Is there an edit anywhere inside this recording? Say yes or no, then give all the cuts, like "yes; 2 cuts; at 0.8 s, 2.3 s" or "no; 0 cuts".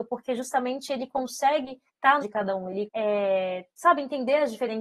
yes; 4 cuts; at 1.9 s, 2.2 s, 2.9 s, 3.7 s